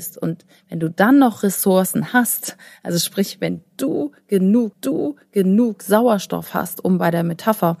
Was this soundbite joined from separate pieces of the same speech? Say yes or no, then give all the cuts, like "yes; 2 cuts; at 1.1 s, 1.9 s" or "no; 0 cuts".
yes; 1 cut; at 4.7 s